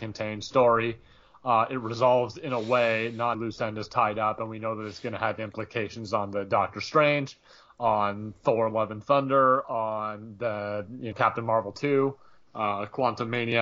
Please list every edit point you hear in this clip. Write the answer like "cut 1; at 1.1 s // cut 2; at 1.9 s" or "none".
cut 1; at 3.3 s // cut 2; at 11.1 s

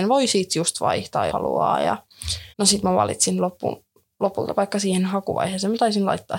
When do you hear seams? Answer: cut 1; at 1.3 s // cut 2; at 2.5 s // cut 3; at 4.5 s

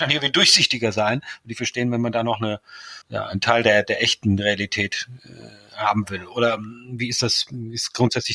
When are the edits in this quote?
cut 1; at 3.0 s // cut 2; at 3.8 s

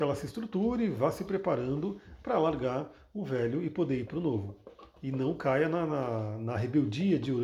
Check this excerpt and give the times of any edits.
none

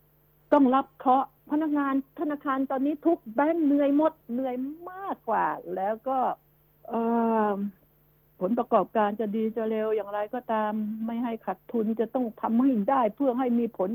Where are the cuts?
cut 1; at 1.4 s // cut 2; at 4.2 s // cut 3; at 6.5 s

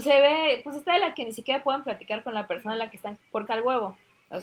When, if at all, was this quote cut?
cut 1; at 1.1 s // cut 2; at 3.2 s // cut 3; at 3.5 s

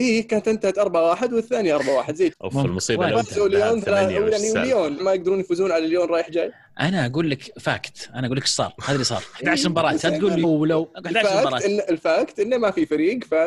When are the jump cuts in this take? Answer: cut 1; at 2.3 s // cut 2; at 5.0 s // cut 3; at 10.4 s

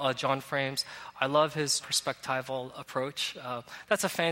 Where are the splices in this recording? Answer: cut 1; at 1.8 s

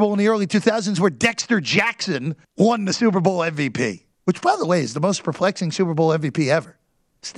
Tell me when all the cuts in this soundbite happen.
cut 1; at 2.4 s // cut 2; at 4.1 s

